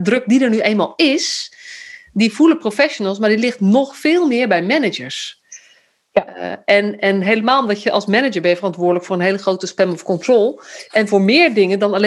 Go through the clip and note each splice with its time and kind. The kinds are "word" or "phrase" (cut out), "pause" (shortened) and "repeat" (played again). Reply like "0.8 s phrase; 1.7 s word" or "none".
none